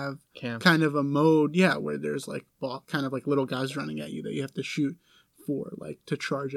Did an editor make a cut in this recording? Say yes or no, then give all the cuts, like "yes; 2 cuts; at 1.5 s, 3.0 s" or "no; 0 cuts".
no; 0 cuts